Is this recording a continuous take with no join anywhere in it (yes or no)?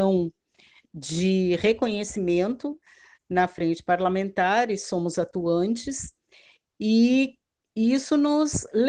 yes